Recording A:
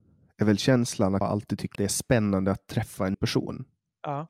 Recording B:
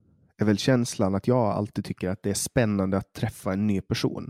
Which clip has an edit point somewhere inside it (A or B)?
A